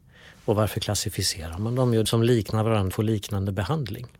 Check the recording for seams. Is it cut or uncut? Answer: cut